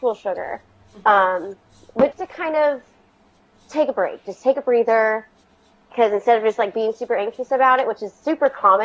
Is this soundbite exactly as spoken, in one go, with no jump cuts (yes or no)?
no